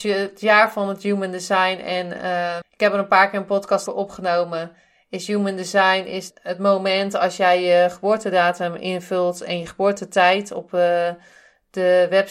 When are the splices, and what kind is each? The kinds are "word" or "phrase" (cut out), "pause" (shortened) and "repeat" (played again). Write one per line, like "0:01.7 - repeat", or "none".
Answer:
0:02.6 - word
0:03.9 - word
0:06.3 - word